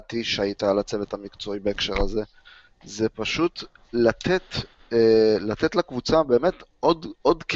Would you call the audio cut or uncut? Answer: uncut